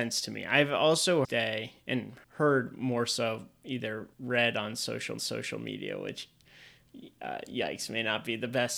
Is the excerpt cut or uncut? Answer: cut